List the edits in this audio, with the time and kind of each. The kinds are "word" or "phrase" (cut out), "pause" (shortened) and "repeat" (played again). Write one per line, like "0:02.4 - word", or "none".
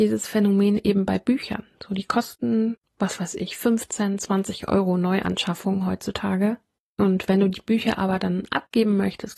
0:02.9 - pause